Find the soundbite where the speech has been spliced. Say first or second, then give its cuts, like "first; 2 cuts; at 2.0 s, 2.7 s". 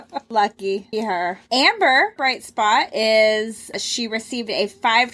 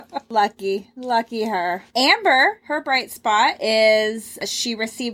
first; 2 cuts; at 0.9 s, 2.2 s